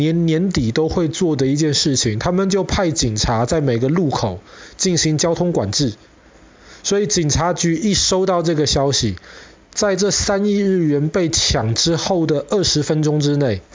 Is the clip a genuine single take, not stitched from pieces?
yes; 0 cuts

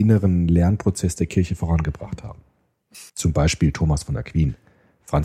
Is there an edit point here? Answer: yes; 1 cut; at 3.1 s

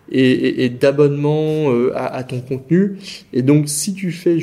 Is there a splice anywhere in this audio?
no; 0 cuts

